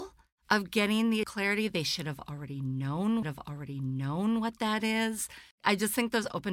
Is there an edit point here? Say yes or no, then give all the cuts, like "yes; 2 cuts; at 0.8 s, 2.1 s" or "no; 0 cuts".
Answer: yes; 3 cuts; at 1.2 s, 3.2 s, 5.5 s